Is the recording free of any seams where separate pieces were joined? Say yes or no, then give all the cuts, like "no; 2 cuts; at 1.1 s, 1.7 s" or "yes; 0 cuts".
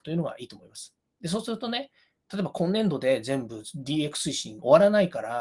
yes; 0 cuts